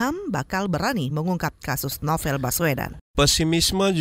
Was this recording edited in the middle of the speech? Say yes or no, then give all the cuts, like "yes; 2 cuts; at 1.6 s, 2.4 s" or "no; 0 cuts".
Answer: no; 0 cuts